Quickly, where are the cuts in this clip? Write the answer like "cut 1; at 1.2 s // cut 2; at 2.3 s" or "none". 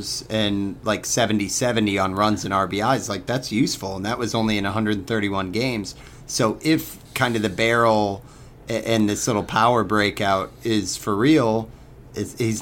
cut 1; at 7.1 s

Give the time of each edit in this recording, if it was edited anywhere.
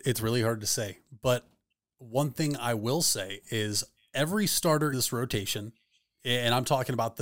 cut 1; at 4.9 s

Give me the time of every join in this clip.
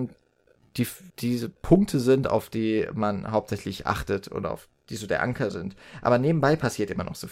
cut 1; at 1.1 s

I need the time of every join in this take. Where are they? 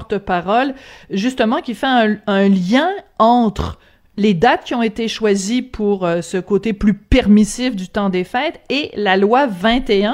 none

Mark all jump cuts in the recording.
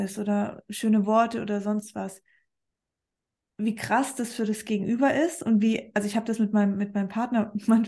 none

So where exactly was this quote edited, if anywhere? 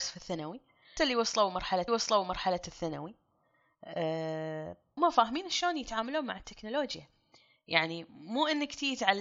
cut 1; at 1.0 s // cut 2; at 1.9 s // cut 3; at 5.0 s

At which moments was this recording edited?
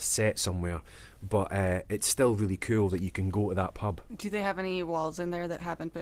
none

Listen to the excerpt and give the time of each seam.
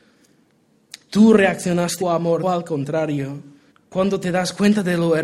cut 1; at 2.0 s // cut 2; at 2.4 s // cut 3; at 3.7 s

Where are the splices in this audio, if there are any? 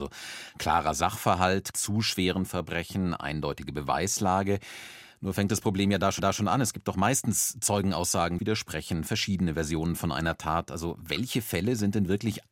cut 1; at 1.7 s // cut 2; at 6.2 s // cut 3; at 8.4 s

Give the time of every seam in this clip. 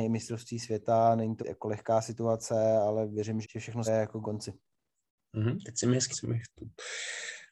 cut 1; at 1.4 s // cut 2; at 3.4 s // cut 3; at 3.9 s // cut 4; at 4.2 s // cut 5; at 6.1 s

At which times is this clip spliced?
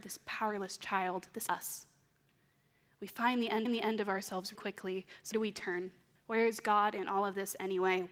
cut 1; at 1.5 s // cut 2; at 3.6 s // cut 3; at 4.5 s // cut 4; at 5.3 s // cut 5; at 6.1 s

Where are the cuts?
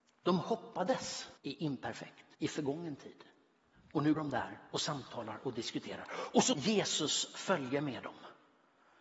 cut 1; at 1.4 s // cut 2; at 2.3 s // cut 3; at 4.1 s // cut 4; at 6.5 s

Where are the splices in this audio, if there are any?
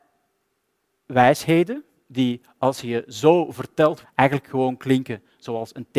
cut 1; at 4.0 s

